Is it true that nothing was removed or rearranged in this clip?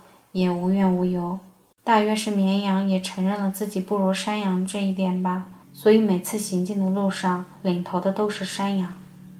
no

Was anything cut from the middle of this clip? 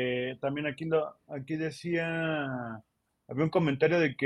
no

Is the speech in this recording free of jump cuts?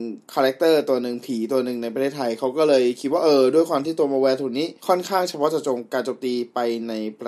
no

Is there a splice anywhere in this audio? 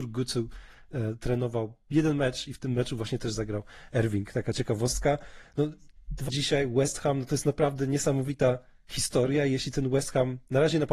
yes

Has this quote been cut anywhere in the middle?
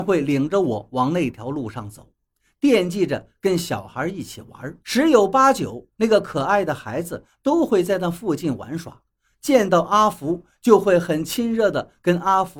yes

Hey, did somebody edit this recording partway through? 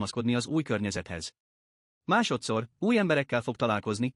no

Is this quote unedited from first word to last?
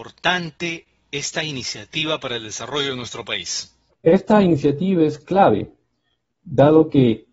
no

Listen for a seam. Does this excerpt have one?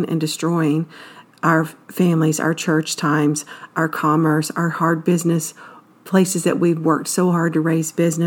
no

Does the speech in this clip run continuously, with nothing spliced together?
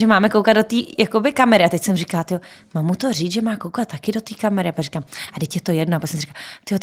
yes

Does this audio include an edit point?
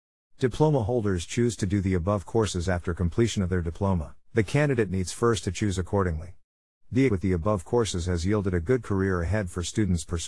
yes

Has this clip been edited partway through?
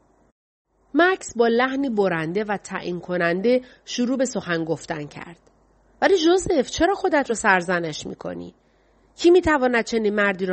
no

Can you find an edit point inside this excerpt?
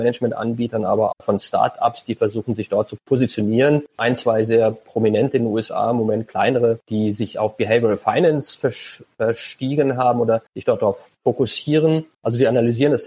yes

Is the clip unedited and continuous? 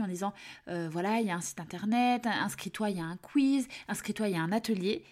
yes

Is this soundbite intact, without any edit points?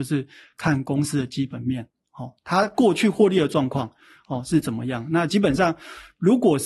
yes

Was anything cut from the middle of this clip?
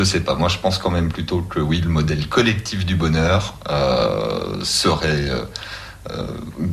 no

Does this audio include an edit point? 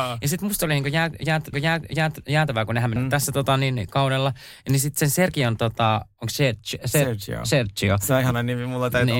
yes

